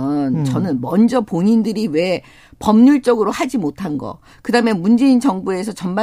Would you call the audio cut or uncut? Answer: uncut